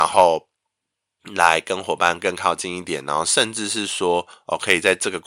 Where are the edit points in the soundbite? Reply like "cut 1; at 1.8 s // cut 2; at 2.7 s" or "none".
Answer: none